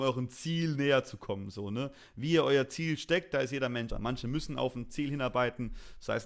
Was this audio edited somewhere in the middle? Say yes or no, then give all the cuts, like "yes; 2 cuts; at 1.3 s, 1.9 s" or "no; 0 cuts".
yes; 1 cut; at 3.9 s